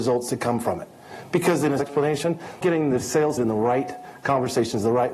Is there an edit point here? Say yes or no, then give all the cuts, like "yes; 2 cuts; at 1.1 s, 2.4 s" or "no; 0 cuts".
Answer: yes; 3 cuts; at 1.8 s, 2.6 s, 3.4 s